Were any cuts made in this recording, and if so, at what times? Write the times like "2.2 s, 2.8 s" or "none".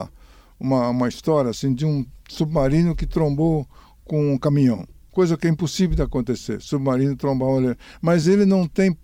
none